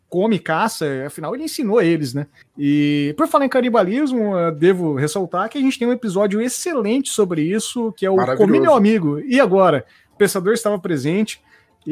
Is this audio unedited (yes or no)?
no